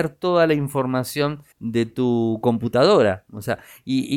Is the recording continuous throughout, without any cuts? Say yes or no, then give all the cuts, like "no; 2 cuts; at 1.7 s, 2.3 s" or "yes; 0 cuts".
no; 1 cut; at 1.5 s